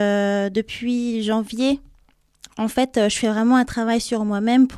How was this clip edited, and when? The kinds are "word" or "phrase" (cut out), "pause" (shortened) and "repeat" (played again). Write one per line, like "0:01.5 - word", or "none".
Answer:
none